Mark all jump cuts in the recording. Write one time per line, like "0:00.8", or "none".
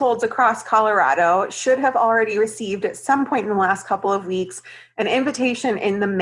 none

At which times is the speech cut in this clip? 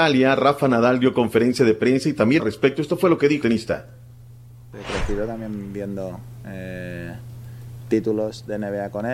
0:02.4
0:03.4

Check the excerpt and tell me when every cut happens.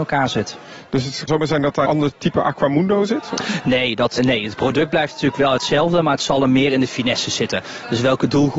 0:01.3
0:01.9
0:04.2

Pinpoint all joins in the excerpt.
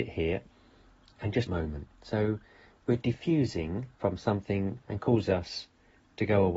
0:01.5
0:01.9
0:03.9
0:04.8

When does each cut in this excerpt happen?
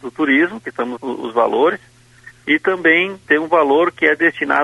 0:01.0
0:03.2

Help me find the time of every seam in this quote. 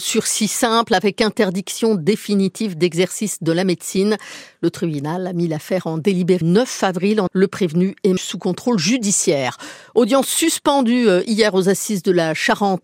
0:06.4
0:07.3
0:08.2

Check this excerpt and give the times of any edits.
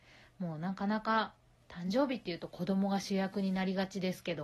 none

